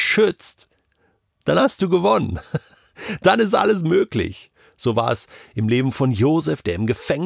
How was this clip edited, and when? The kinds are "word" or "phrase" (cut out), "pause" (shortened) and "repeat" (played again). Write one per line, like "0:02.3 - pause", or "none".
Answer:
none